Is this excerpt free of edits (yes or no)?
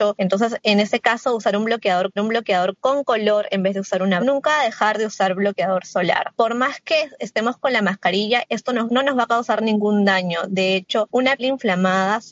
no